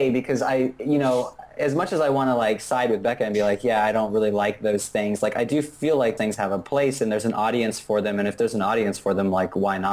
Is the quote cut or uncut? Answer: cut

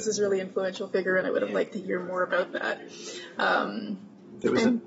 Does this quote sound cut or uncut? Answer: uncut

